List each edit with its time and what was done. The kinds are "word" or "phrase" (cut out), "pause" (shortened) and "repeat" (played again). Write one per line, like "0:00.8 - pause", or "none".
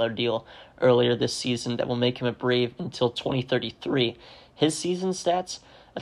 none